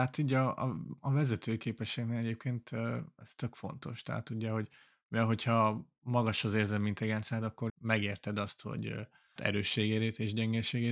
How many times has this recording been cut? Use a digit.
2